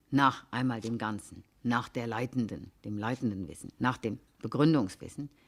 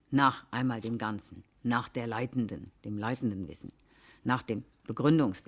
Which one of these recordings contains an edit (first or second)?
first